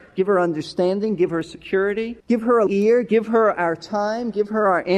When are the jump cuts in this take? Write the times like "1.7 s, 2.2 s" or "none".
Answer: 2.2 s, 2.7 s